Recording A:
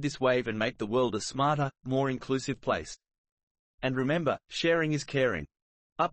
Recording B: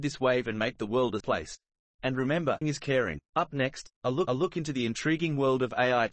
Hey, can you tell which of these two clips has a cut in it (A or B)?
B